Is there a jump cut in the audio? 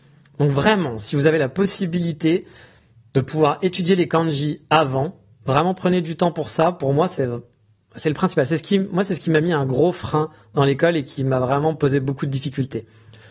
no; 0 cuts

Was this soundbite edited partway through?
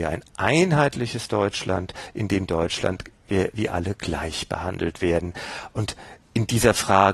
no; 0 cuts

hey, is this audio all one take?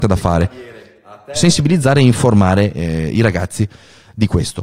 yes; 0 cuts

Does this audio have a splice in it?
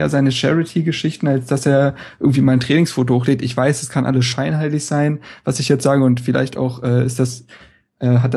no; 0 cuts

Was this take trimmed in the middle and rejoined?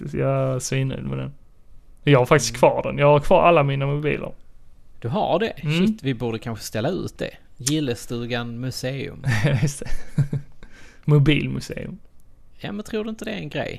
no; 0 cuts

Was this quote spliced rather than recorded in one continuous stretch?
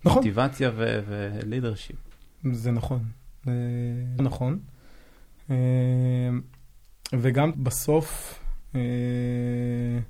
yes; 2 cuts; at 4.2 s, 7.5 s

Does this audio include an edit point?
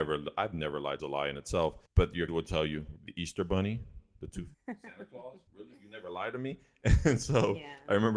yes; 6 cuts; at 1.0 s, 1.9 s, 2.3 s, 3.0 s, 4.5 s, 5.5 s

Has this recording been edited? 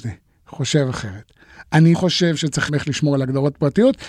yes; 2 cuts; at 1.9 s, 2.7 s

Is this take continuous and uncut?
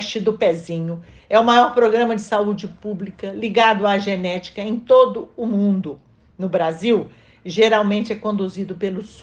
yes; 0 cuts

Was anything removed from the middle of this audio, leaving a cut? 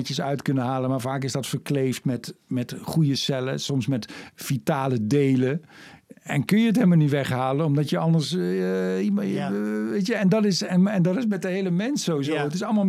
yes; 1 cut; at 2.4 s

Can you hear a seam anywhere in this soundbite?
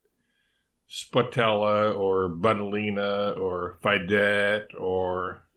no; 0 cuts

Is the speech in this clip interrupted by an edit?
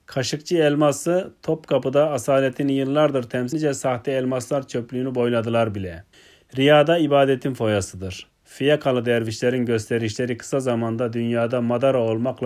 yes; 2 cuts; at 3.5 s, 6.1 s

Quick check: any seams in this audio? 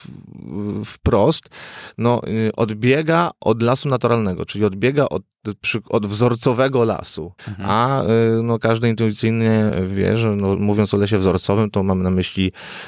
yes; 1 cut; at 7.4 s

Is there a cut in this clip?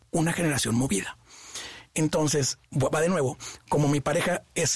yes; 1 cut; at 2.6 s

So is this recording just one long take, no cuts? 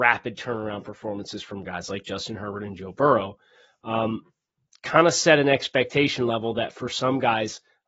yes; 0 cuts

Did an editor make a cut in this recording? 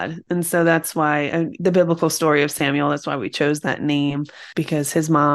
no; 0 cuts

